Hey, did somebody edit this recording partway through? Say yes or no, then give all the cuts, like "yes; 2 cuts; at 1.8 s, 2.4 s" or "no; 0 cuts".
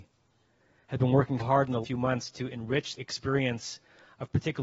yes; 3 cuts; at 1.4 s, 1.8 s, 3.0 s